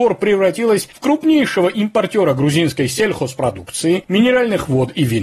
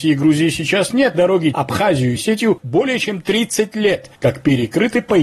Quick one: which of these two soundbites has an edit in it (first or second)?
second